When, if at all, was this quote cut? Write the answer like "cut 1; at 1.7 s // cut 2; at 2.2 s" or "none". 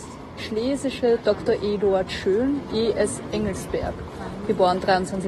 cut 1; at 1.2 s // cut 2; at 2.7 s

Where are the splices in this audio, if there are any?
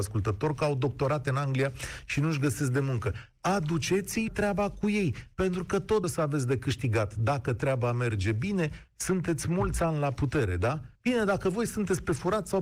cut 1; at 4.3 s // cut 2; at 6.0 s // cut 3; at 11.0 s

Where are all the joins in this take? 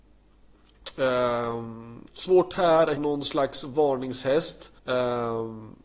cut 1; at 2.1 s // cut 2; at 3.0 s // cut 3; at 4.8 s

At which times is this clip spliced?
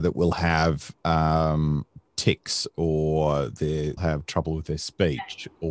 cut 1; at 4.0 s

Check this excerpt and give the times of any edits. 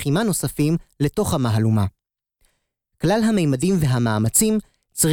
none

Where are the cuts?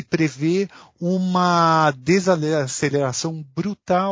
none

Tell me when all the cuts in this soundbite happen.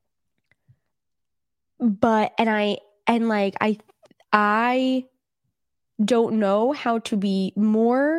none

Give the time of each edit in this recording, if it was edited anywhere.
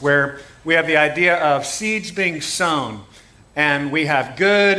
none

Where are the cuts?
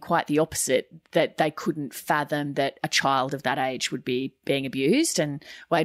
none

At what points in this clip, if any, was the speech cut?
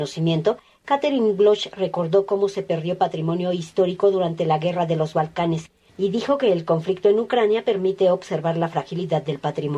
none

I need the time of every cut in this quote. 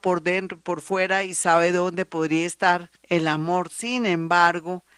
cut 1; at 3.0 s

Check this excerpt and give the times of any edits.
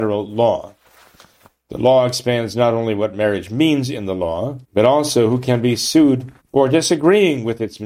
cut 1; at 4.6 s // cut 2; at 6.4 s

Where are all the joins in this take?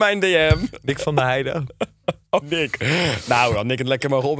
cut 1; at 2.4 s

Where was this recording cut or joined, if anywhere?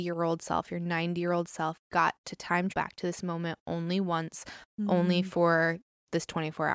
cut 1; at 2.2 s // cut 2; at 2.7 s

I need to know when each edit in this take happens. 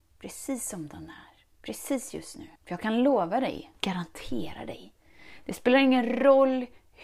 cut 1; at 1.5 s // cut 2; at 2.6 s // cut 3; at 3.8 s

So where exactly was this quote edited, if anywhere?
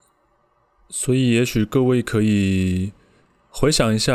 none

